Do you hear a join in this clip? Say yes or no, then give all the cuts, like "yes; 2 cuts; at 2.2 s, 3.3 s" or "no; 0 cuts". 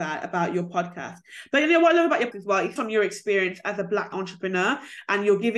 yes; 3 cuts; at 2.3 s, 2.8 s, 4.1 s